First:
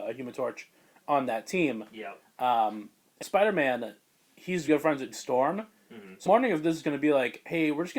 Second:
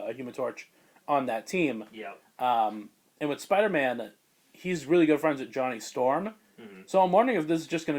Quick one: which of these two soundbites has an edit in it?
first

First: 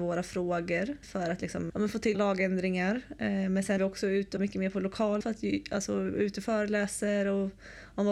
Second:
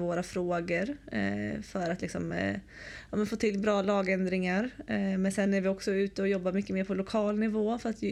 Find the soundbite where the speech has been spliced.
first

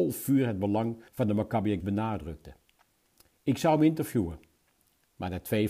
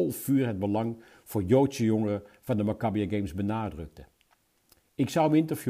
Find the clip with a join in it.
first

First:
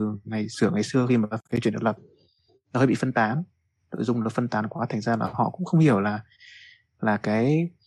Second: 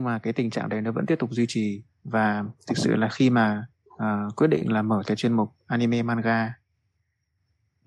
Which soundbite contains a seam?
second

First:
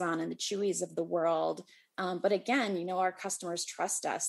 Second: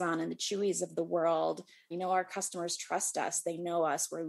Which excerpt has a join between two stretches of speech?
second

